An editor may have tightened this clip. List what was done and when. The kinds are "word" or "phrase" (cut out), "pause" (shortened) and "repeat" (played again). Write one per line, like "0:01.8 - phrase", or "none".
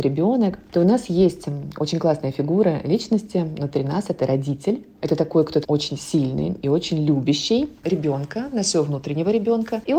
0:05.6 - word

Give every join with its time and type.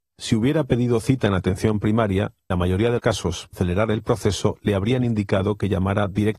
0:02.5 - word
0:03.0 - word
0:03.5 - word

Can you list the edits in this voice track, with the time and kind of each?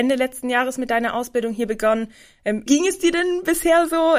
0:02.7 - word

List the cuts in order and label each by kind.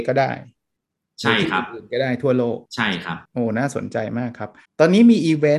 0:02.7 - pause
0:03.2 - pause
0:04.6 - pause

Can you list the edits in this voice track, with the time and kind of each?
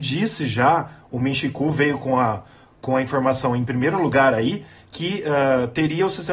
none

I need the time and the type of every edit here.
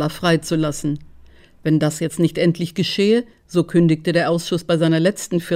none

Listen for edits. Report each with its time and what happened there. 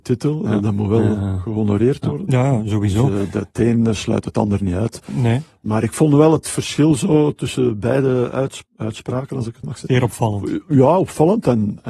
0:08.7 - pause
0:09.6 - word

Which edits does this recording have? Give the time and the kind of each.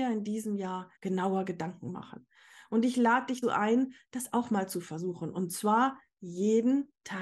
0:01.0 - pause
0:03.4 - word

